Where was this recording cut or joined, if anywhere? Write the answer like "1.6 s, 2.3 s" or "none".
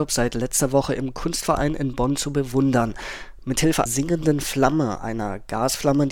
3.9 s